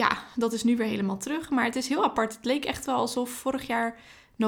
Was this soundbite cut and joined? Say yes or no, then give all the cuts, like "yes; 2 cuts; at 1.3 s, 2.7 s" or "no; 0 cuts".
no; 0 cuts